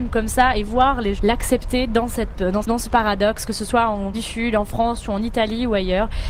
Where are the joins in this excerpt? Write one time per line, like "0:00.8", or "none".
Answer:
0:01.2
0:02.6
0:04.1